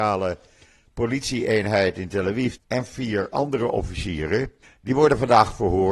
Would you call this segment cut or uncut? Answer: cut